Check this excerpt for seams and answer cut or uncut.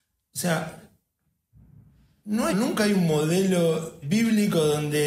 cut